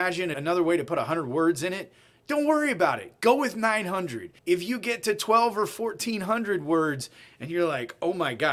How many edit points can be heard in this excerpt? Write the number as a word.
one